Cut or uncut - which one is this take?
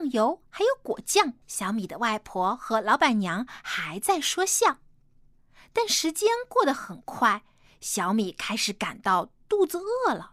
cut